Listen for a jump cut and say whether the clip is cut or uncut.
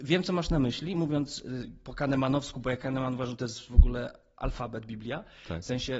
uncut